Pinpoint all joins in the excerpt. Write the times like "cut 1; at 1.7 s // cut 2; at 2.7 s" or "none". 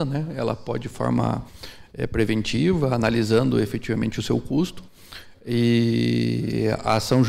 cut 1; at 0.9 s